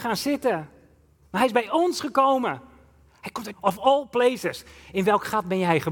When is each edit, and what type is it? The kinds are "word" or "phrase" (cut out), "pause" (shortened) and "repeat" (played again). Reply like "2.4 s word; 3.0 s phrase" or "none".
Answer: 3.5 s word